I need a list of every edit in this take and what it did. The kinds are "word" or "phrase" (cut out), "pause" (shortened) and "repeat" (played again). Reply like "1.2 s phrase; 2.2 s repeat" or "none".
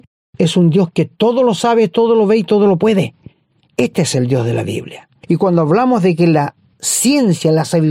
none

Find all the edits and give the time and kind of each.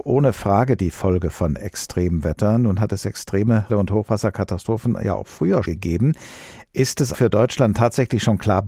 3.7 s word; 5.6 s word; 7.1 s word

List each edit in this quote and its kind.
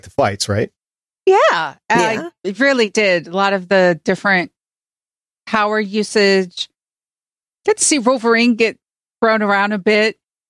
none

